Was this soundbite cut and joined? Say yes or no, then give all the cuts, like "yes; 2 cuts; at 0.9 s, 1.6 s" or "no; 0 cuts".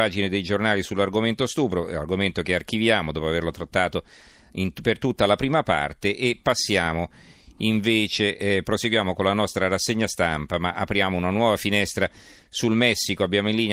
no; 0 cuts